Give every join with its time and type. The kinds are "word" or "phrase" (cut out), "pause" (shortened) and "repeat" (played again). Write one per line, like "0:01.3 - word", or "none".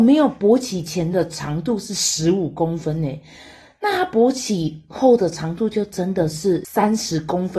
none